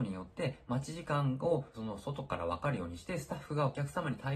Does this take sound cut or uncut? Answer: cut